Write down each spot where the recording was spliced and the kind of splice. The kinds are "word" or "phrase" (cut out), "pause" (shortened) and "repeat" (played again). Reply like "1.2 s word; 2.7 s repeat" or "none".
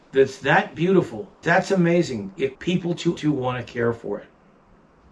1.4 s word; 2.5 s word; 3.2 s word